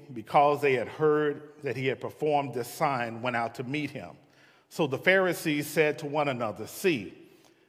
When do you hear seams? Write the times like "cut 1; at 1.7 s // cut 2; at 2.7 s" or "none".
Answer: none